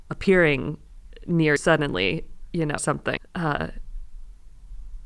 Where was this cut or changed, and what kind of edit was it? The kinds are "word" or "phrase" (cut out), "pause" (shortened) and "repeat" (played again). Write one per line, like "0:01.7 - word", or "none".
0:01.6 - word
0:02.8 - word
0:03.2 - word